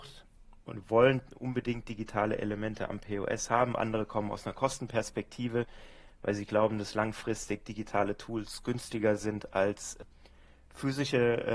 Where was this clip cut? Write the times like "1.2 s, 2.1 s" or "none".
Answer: none